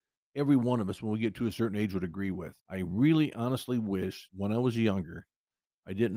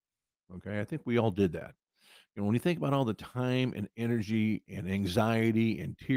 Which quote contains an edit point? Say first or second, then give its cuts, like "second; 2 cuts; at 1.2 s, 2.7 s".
first; 2 cuts; at 2.6 s, 4.3 s